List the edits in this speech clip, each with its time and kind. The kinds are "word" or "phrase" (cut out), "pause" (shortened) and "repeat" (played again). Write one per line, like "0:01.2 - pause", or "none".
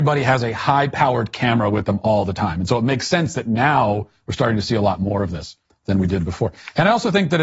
0:05.7 - pause